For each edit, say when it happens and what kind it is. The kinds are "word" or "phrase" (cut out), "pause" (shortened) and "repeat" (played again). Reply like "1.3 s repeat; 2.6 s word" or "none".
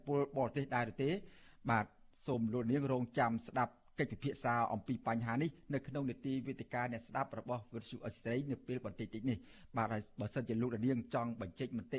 none